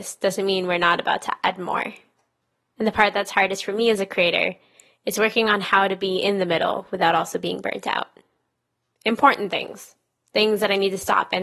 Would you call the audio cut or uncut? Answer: uncut